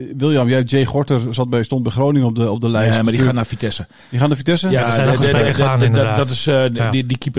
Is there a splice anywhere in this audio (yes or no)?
no